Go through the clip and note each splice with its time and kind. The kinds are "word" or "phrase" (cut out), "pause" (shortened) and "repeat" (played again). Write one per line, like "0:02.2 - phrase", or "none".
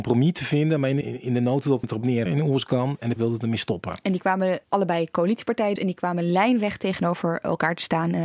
0:01.0 - word
0:01.8 - word
0:02.3 - phrase
0:03.2 - word
0:04.6 - pause
0:05.8 - word